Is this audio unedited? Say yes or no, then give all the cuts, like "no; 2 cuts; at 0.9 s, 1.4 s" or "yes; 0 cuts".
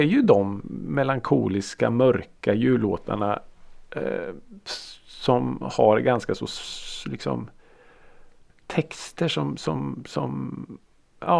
yes; 0 cuts